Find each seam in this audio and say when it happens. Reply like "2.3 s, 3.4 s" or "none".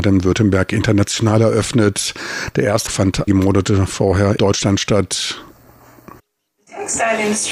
2.9 s, 3.3 s, 4.4 s